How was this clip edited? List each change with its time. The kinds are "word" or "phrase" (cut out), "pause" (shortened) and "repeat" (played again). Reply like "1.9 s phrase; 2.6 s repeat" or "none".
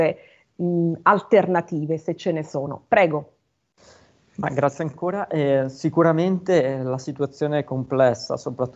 none